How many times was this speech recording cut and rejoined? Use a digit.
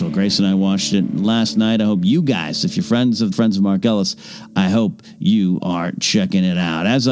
1